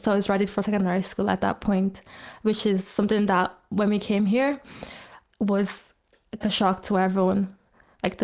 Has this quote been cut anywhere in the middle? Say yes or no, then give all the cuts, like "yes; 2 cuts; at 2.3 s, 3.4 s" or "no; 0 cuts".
yes; 1 cut; at 6.4 s